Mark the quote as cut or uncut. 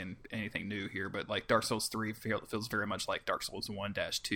uncut